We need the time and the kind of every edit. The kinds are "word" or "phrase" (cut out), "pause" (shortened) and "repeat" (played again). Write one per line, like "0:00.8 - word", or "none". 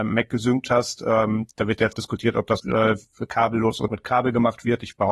0:01.5 - pause
0:01.9 - word
0:02.6 - word
0:03.9 - word